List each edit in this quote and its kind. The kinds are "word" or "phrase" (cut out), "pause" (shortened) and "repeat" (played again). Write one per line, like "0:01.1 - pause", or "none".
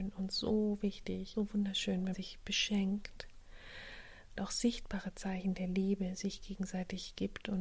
0:01.3 - word
0:02.1 - word
0:04.4 - word